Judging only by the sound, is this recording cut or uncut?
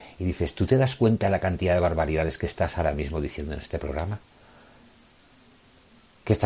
uncut